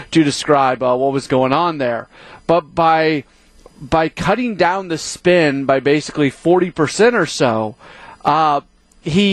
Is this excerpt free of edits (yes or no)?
yes